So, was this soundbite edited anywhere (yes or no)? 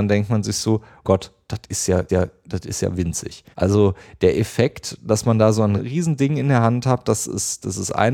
yes